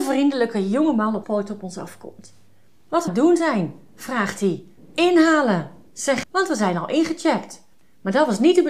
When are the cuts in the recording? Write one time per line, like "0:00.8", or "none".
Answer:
0:01.2
0:03.1
0:04.8
0:06.2
0:07.7